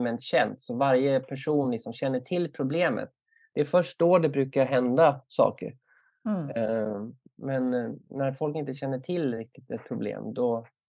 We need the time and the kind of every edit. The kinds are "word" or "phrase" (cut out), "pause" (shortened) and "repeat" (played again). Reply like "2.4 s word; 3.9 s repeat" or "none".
none